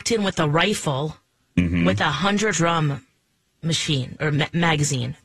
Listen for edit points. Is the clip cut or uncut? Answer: cut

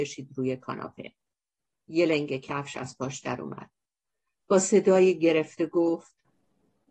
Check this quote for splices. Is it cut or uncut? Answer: uncut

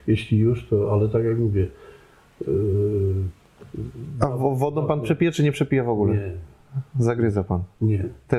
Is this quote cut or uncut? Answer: uncut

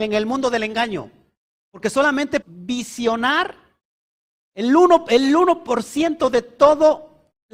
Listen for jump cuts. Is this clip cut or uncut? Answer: cut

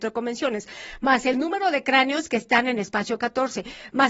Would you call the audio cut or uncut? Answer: uncut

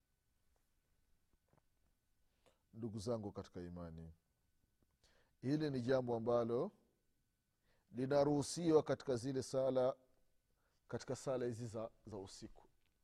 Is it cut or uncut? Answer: uncut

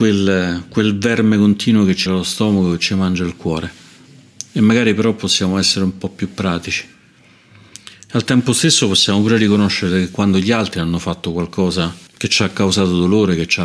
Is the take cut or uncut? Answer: cut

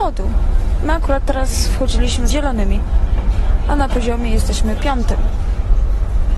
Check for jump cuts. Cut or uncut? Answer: cut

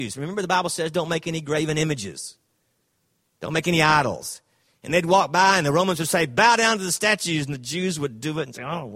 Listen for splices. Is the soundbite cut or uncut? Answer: uncut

